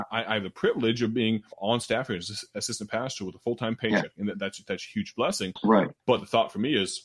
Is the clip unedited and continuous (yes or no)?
no